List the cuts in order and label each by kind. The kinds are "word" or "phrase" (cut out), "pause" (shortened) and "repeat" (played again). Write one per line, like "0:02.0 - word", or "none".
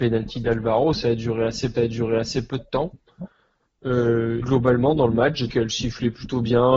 0:01.7 - repeat
0:04.4 - word
0:05.5 - word